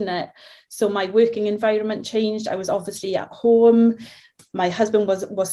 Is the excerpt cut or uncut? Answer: uncut